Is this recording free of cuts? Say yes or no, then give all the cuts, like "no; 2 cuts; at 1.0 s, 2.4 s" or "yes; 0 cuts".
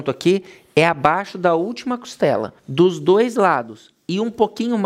no; 1 cut; at 2.6 s